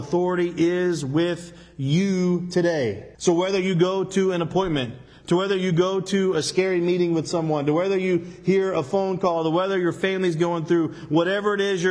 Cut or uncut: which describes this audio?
cut